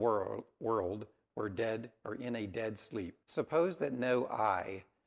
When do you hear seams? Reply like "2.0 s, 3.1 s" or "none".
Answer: 3.2 s

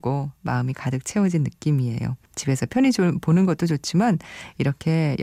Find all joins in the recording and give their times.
2.3 s

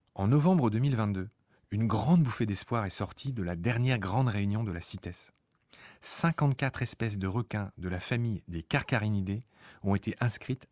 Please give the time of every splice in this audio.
none

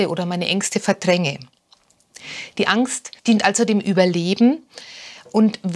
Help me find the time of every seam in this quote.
3.2 s

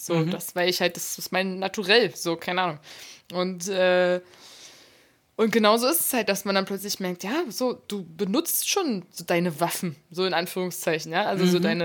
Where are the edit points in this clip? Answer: none

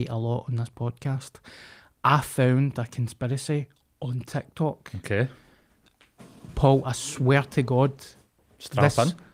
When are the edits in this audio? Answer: none

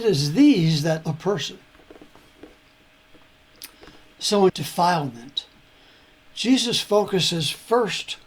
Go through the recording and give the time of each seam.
1.0 s, 4.5 s

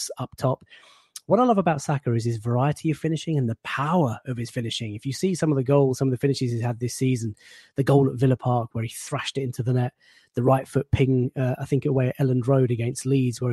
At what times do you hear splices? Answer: none

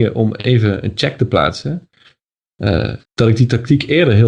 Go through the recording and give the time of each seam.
3.0 s

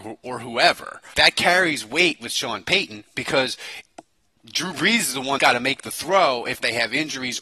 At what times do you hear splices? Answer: 1.1 s, 5.4 s

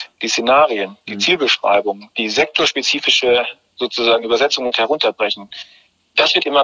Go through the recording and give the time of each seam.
none

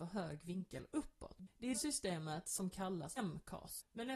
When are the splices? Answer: 1.7 s, 3.2 s

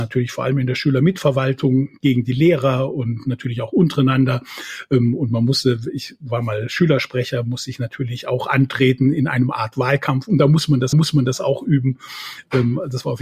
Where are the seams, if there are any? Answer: 10.9 s

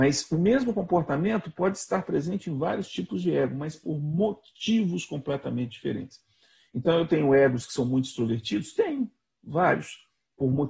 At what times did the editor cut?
none

